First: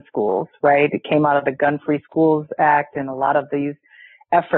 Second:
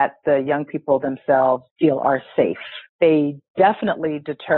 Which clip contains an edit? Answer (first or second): second